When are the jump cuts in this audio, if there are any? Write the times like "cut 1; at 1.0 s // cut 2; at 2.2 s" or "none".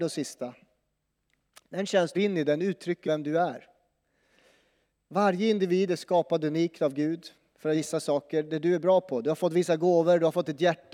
cut 1; at 2.1 s // cut 2; at 3.0 s // cut 3; at 7.7 s